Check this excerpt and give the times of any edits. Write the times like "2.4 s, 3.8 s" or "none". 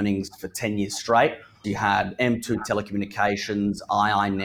1.6 s